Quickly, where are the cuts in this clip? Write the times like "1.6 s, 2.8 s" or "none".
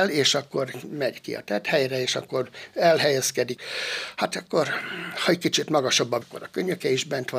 6.2 s